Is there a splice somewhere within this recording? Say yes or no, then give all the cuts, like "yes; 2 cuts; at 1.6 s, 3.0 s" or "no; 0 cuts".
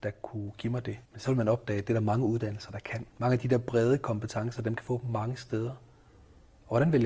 yes; 3 cuts; at 1.0 s, 3.1 s, 4.8 s